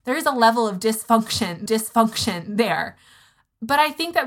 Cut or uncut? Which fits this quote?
cut